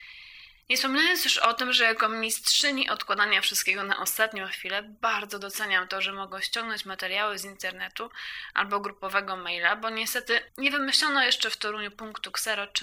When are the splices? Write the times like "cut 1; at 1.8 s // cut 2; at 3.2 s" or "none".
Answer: cut 1; at 10.5 s